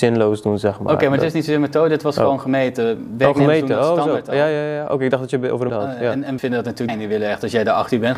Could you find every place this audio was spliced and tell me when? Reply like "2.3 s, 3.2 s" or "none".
5.7 s, 6.4 s, 6.9 s